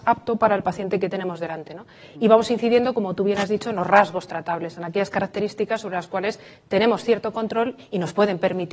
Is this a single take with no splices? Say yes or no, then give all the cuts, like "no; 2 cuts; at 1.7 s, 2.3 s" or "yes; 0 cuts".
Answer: yes; 0 cuts